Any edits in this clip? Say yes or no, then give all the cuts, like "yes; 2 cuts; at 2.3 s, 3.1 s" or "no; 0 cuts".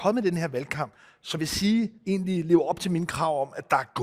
yes; 2 cuts; at 1.4 s, 2.0 s